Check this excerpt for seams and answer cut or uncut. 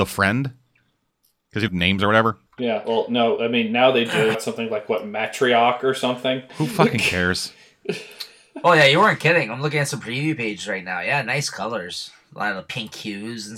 cut